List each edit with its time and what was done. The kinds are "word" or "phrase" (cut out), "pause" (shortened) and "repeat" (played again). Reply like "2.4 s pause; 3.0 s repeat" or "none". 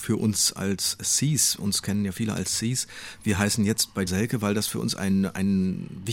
4.1 s phrase